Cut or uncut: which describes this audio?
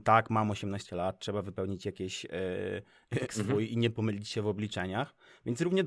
cut